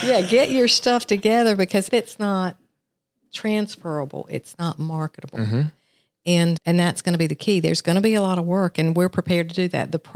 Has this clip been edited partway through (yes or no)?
yes